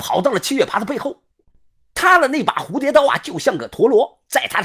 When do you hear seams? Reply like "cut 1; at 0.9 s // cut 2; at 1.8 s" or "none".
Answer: none